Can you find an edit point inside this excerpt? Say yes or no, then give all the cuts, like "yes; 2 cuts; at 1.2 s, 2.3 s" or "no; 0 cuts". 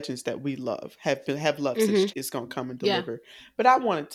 yes; 1 cut; at 2.1 s